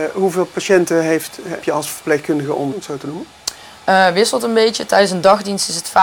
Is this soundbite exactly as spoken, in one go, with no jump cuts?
no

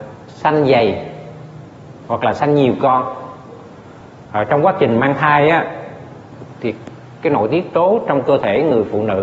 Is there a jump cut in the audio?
no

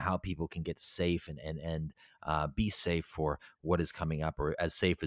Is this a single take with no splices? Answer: yes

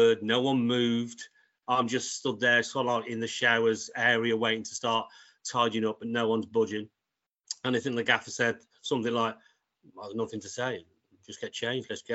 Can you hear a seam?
no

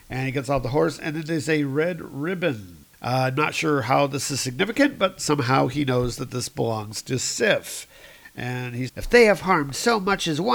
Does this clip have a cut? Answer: yes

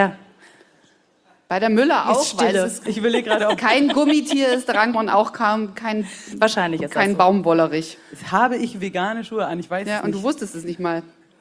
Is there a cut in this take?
yes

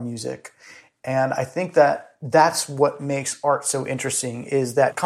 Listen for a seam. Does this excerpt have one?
no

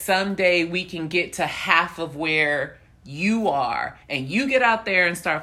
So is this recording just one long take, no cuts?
no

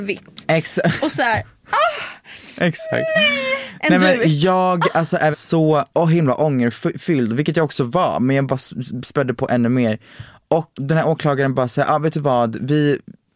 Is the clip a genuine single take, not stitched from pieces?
no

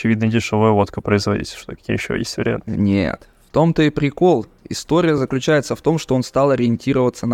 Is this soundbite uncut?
yes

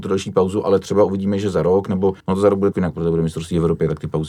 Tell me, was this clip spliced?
yes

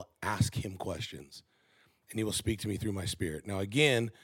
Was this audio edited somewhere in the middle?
no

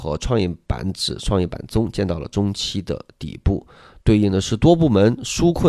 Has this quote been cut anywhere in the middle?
no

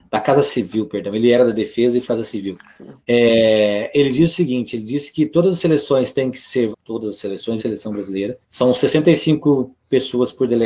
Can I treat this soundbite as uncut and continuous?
no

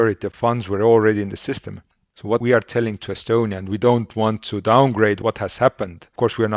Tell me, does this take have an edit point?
no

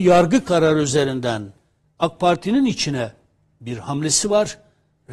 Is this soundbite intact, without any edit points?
yes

